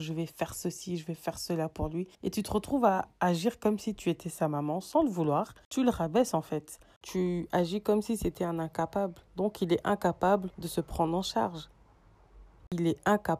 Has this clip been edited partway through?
yes; 3 cuts; at 2.1 s, 9.3 s, 10.5 s

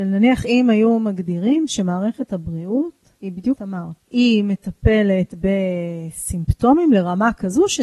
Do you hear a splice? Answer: yes; 3 cuts; at 3.2 s, 3.6 s, 4.0 s

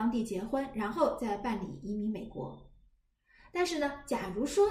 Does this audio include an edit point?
no; 0 cuts

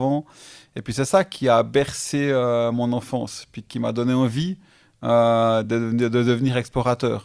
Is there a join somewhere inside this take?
no; 0 cuts

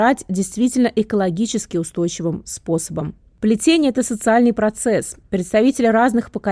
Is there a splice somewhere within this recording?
no; 0 cuts

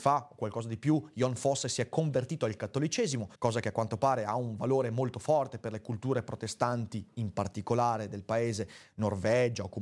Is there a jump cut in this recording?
yes; 1 cut; at 3.3 s

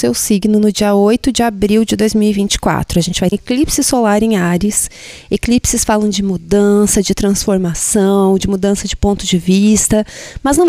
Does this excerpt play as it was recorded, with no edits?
no; 1 cut; at 3.3 s

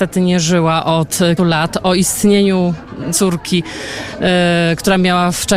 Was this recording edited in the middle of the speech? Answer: yes; 2 cuts; at 1.4 s, 3.1 s

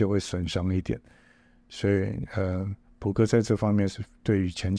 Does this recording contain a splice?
no; 0 cuts

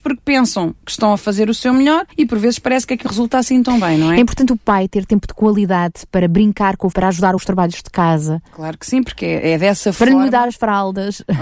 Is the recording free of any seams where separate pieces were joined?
no; 5 cuts; at 2.1 s, 3.1 s, 6.9 s, 7.4 s, 8.5 s

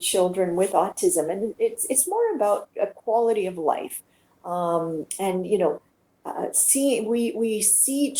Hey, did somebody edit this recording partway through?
no; 0 cuts

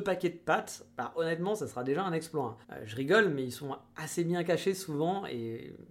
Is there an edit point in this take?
yes; 1 cut; at 2.6 s

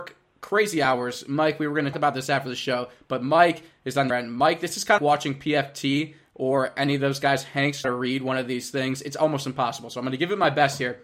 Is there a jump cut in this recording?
yes; 4 cuts; at 1.9 s, 4.1 s, 5.0 s, 7.8 s

